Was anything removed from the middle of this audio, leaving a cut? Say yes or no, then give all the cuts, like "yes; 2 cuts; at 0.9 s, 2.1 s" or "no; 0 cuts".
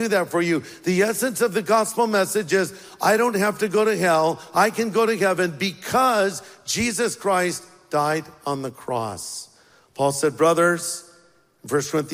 no; 0 cuts